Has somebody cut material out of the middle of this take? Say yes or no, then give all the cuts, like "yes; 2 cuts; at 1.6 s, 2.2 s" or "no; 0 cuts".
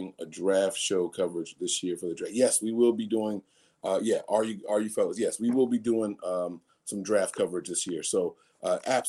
no; 0 cuts